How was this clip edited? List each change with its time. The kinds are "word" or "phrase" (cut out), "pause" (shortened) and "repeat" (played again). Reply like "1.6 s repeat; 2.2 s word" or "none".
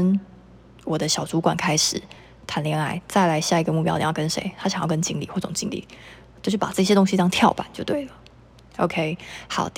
none